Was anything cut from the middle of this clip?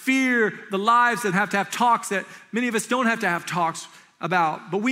yes; 1 cut; at 1.3 s

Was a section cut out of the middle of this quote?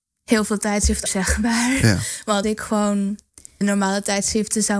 yes; 3 cuts; at 1.1 s, 2.4 s, 3.6 s

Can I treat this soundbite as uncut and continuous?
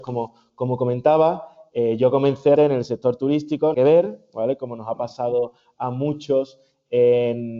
no; 2 cuts; at 2.6 s, 3.7 s

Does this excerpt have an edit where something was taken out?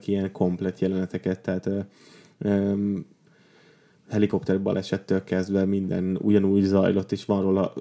no; 0 cuts

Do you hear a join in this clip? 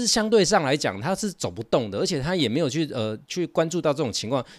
no; 0 cuts

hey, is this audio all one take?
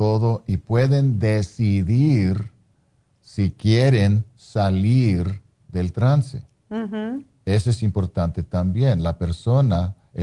yes; 0 cuts

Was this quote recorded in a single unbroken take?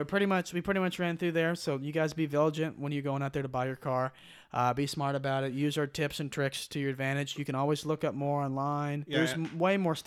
yes; 0 cuts

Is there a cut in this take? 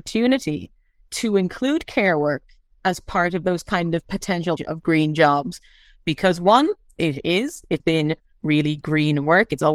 yes; 2 cuts; at 4.6 s, 7.8 s

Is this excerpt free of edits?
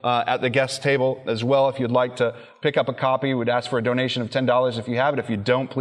yes; 0 cuts

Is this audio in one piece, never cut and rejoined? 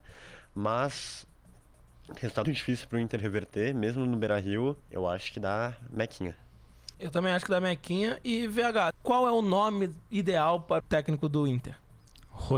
no; 5 cuts; at 2.4 s, 4.8 s, 6.9 s, 8.9 s, 10.8 s

